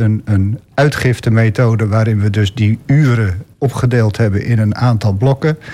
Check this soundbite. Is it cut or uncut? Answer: cut